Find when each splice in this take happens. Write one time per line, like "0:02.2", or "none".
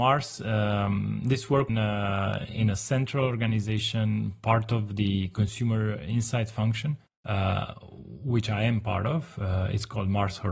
0:01.7
0:07.1